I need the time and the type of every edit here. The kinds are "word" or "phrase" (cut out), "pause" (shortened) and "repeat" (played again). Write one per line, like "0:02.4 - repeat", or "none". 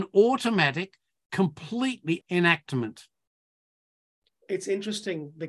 0:02.2 - word